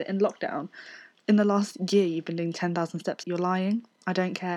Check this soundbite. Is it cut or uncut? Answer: cut